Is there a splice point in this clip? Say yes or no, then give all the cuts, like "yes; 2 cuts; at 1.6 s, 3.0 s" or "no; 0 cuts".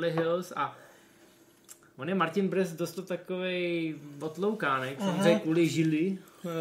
yes; 1 cut; at 2.9 s